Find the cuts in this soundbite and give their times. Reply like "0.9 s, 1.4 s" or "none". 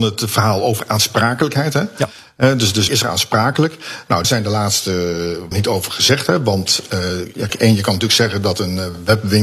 2.9 s, 4.2 s, 5.5 s, 7.5 s